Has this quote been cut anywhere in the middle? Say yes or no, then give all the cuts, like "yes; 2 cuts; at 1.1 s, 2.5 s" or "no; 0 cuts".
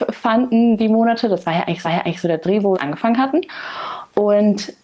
yes; 2 cuts; at 1.8 s, 2.7 s